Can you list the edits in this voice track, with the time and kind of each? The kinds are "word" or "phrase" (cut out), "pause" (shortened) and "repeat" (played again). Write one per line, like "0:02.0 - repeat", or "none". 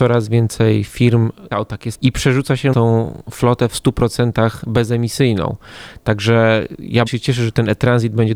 0:01.5 - word
0:01.9 - word
0:02.7 - word
0:07.1 - word